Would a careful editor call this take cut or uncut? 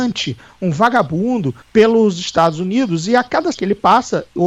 cut